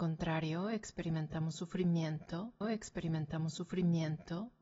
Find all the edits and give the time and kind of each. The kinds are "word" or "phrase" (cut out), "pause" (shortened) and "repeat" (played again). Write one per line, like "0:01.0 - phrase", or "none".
0:02.6 - repeat